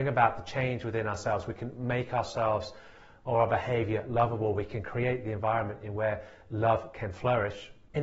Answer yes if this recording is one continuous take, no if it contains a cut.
yes